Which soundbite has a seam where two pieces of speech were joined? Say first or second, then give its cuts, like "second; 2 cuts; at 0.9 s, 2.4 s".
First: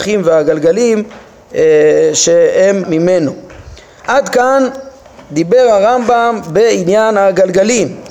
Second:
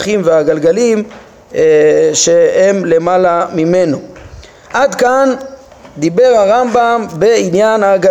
first; 1 cut; at 2.8 s